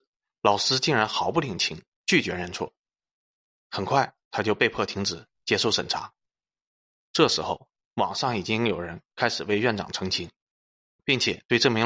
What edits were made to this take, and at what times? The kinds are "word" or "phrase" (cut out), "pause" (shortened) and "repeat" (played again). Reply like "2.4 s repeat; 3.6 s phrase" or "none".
none